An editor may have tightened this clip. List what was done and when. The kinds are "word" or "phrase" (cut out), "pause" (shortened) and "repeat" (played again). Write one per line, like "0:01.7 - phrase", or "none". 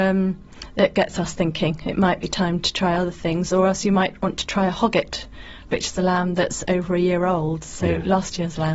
none